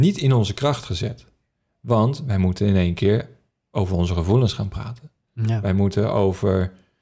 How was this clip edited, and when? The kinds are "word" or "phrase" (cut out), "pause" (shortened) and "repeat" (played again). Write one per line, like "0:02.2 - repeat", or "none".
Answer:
none